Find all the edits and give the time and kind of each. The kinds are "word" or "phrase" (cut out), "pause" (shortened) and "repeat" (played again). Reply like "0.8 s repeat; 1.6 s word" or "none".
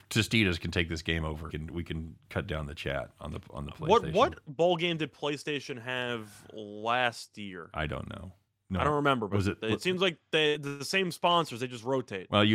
1.5 s phrase; 8.5 s pause